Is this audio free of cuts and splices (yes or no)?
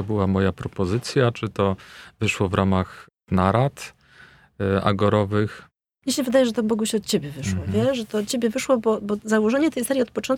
yes